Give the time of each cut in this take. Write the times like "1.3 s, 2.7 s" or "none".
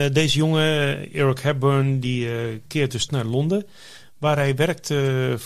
3.1 s